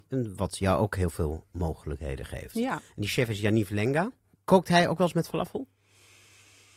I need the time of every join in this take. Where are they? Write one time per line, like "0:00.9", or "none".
none